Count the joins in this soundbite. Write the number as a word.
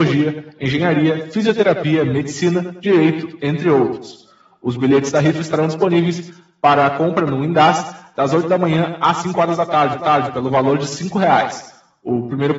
one